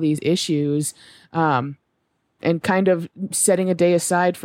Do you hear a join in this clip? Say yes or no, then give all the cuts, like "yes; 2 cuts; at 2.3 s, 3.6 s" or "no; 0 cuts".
yes; 1 cut; at 2.4 s